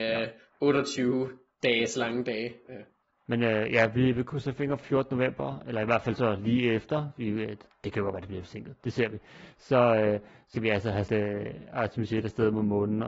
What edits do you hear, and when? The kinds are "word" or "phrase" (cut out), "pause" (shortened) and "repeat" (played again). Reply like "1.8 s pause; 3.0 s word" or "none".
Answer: 4.8 s word; 10.6 s word; 11.1 s word